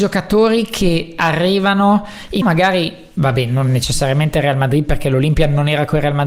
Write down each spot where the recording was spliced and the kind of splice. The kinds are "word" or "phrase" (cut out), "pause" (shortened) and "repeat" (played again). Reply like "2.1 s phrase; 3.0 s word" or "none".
2.4 s phrase